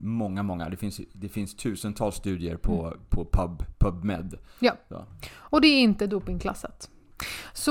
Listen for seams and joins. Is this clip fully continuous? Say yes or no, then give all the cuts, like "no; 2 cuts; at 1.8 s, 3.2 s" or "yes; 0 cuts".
yes; 0 cuts